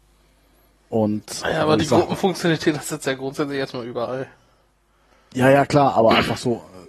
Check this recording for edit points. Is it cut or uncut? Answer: uncut